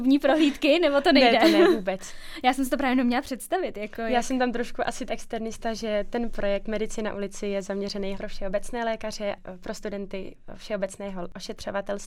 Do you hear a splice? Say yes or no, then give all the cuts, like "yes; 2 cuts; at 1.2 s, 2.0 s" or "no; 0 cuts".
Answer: yes; 2 cuts; at 5.1 s, 8.1 s